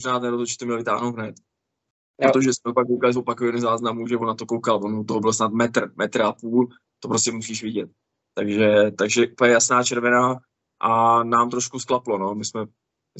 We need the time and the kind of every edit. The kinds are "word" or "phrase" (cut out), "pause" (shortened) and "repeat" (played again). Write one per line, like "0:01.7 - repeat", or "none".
none